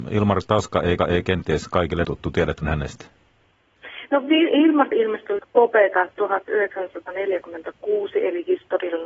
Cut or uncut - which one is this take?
cut